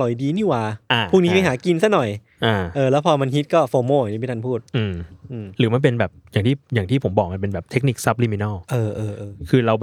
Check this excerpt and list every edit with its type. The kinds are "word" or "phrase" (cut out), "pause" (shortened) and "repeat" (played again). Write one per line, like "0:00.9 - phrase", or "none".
0:04.7 - pause